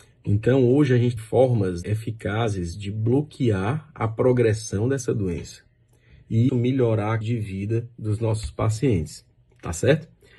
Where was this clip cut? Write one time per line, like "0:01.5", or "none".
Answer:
0:01.2
0:01.8
0:06.5
0:07.2